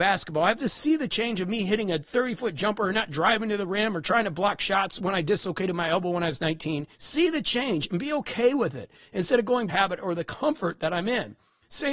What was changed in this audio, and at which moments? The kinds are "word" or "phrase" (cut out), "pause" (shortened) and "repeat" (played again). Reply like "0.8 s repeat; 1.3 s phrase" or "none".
6.9 s pause; 9.7 s phrase